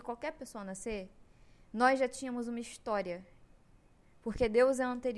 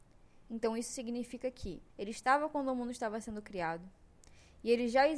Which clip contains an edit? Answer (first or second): second